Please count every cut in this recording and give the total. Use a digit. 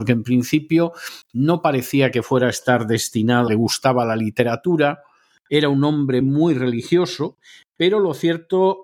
2